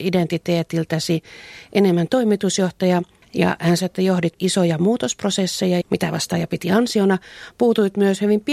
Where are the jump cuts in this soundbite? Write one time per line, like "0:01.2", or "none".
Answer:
0:03.8
0:04.4
0:05.8